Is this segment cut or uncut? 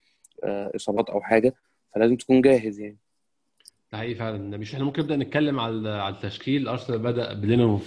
uncut